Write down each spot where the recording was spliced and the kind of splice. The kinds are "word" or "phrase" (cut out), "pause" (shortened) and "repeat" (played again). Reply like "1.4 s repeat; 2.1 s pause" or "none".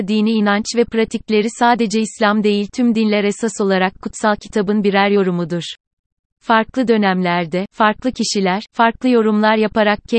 none